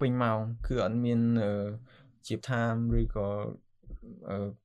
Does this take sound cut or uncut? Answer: cut